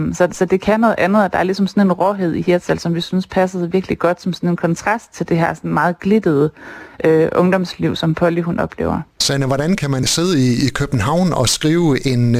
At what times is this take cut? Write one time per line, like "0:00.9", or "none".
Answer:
0:09.1